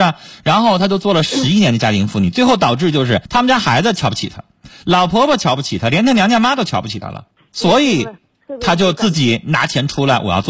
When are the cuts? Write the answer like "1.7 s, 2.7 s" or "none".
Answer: 3.2 s, 7.3 s